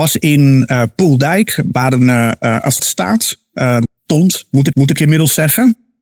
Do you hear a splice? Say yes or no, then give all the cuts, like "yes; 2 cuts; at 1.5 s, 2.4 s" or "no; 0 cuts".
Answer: yes; 3 cuts; at 2.8 s, 3.9 s, 4.7 s